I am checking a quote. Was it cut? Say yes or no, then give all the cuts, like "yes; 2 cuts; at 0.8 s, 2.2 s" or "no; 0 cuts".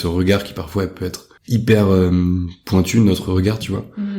yes; 1 cut; at 1.4 s